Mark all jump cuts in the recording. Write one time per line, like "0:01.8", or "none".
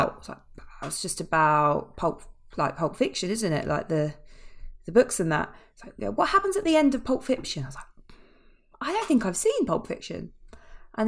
none